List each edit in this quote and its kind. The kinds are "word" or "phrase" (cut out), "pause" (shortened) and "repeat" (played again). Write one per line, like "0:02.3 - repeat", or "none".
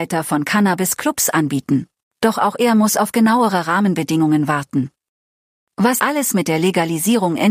0:02.0 - pause
0:06.0 - word